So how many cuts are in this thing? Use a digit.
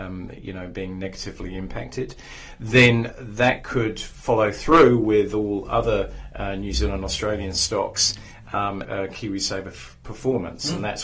2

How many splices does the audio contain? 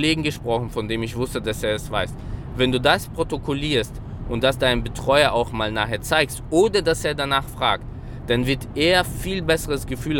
0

